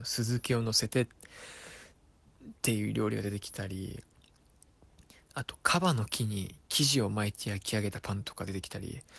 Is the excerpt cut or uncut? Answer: uncut